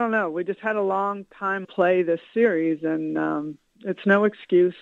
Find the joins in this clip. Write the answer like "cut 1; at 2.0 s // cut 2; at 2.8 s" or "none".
cut 1; at 1.6 s